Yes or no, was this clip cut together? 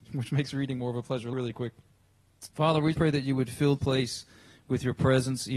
yes